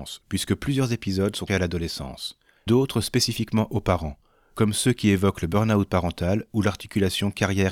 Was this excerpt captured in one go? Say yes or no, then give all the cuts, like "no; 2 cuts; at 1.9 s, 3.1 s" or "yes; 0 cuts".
no; 2 cuts; at 1.5 s, 2.7 s